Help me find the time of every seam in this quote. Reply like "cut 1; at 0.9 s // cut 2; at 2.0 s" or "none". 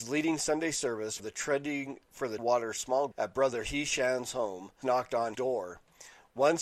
cut 1; at 1.2 s // cut 2; at 2.4 s // cut 3; at 3.1 s // cut 4; at 4.8 s // cut 5; at 5.3 s